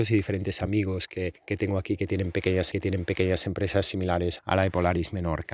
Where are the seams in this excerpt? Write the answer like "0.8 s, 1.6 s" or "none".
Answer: 1.4 s, 2.7 s, 4.4 s